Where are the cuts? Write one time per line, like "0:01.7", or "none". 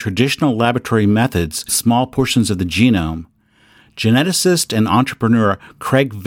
0:01.7